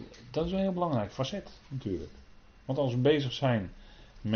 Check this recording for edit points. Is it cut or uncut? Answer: uncut